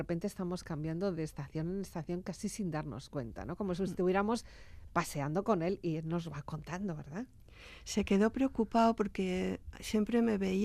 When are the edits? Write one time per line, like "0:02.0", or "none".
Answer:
none

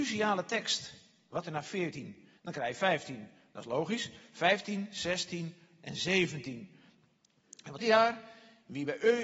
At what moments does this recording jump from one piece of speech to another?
0:01.4
0:02.4
0:07.8

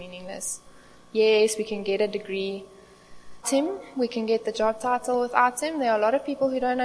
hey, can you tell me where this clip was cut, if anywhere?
0:03.4

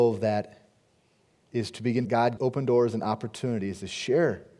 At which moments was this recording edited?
0:02.0
0:02.4

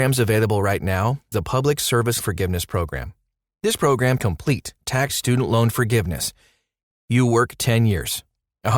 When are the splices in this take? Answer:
0:01.3
0:02.2
0:04.2
0:05.1
0:07.0

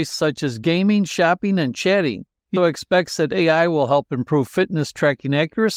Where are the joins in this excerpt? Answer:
0:02.6

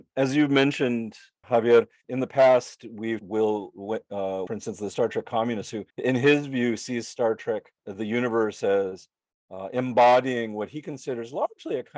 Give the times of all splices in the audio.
0:01.4
0:02.0
0:03.2
0:04.5
0:05.9
0:07.8

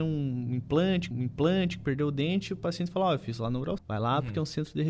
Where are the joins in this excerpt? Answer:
0:01.1
0:03.8

